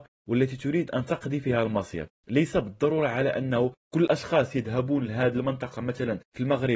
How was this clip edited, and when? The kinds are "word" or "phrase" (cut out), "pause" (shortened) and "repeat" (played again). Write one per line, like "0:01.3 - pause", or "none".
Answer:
none

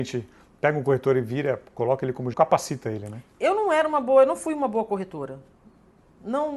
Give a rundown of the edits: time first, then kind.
0:02.3 - phrase

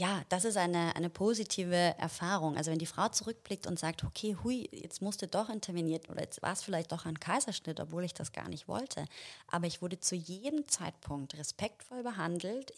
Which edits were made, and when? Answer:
0:06.1 - word
0:06.9 - word

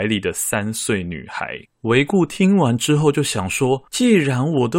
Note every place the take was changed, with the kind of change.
0:01.6 - pause
0:03.9 - pause

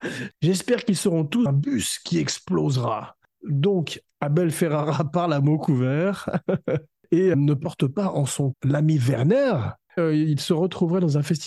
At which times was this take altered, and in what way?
0:01.5 - word
0:07.3 - word
0:08.5 - word
0:10.0 - word

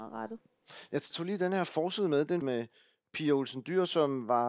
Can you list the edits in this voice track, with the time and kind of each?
0:01.1 - word
0:02.4 - word

